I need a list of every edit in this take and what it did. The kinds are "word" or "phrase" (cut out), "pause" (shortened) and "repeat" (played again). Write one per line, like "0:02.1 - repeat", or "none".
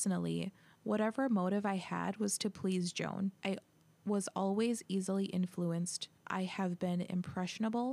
0:03.4 - pause
0:06.2 - pause